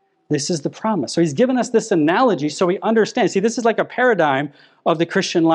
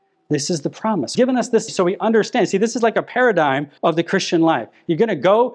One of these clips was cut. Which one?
second; 3 cuts; at 1.1 s, 1.7 s, 3.8 s

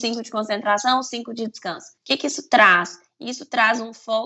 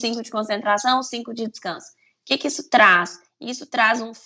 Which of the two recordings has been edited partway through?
first; 1 cut; at 2.0 s

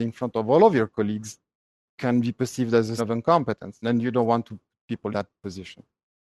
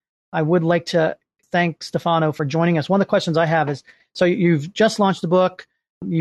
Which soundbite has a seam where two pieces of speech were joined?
first; 3 cuts; at 3.0 s, 3.8 s, 5.1 s

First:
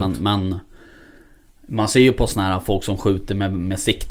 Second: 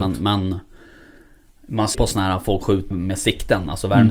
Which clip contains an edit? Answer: second; 3 cuts; at 1.9 s, 2.6 s, 2.9 s

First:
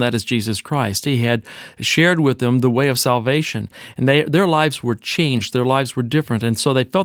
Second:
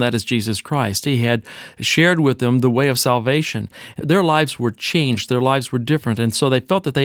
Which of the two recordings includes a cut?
second; 1 cut; at 4.0 s

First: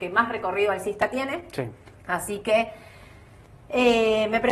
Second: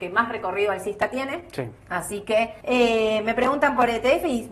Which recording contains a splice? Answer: second; 2 cuts; at 1.8 s, 2.6 s

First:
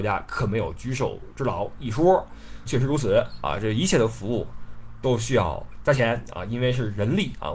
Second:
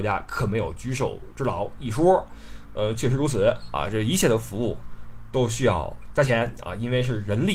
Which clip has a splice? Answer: first; 1 cut; at 2.7 s

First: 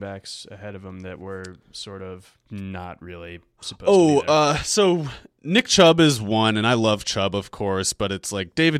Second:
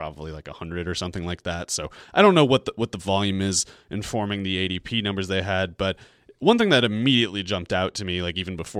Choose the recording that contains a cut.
first; 1 cut; at 2.4 s

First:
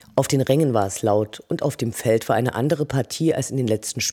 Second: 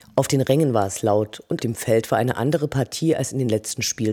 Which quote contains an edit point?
second; 1 cut; at 1.6 s

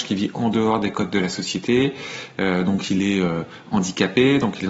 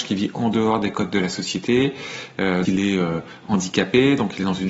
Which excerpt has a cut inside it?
second; 1 cut; at 2.6 s

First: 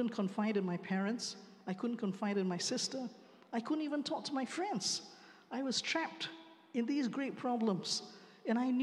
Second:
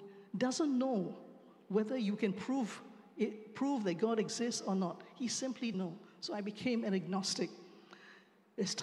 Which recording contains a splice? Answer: second; 1 cut; at 5.7 s

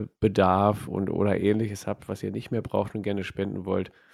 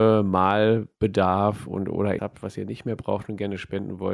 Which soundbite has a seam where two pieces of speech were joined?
second; 1 cut; at 2.2 s

